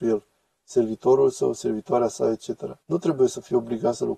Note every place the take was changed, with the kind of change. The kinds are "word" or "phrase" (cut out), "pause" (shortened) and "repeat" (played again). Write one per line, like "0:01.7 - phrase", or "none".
0:02.8 - pause